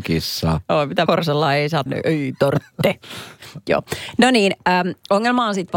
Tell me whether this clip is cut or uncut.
cut